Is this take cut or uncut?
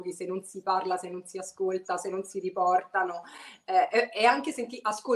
uncut